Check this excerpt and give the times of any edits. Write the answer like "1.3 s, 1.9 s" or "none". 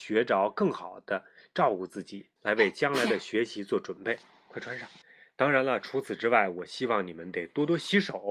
2.4 s, 5.0 s